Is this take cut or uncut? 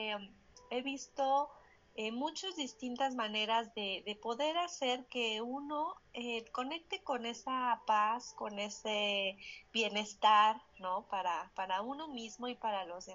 uncut